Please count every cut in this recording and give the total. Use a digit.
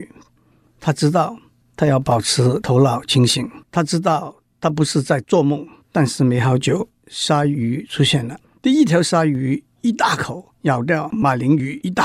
3